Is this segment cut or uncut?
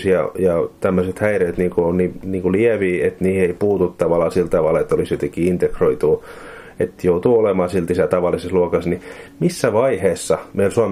cut